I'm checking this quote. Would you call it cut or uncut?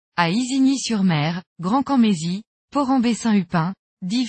uncut